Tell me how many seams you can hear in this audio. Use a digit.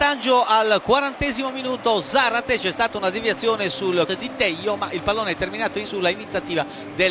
2